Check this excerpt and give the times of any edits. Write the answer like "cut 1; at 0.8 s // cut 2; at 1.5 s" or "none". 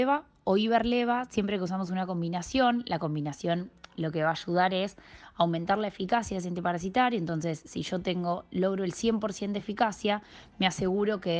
none